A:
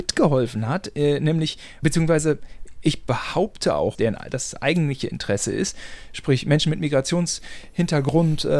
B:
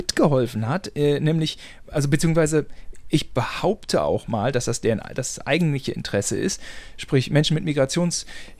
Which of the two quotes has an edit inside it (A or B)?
A